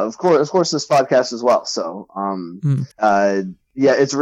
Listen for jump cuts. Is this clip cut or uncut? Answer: cut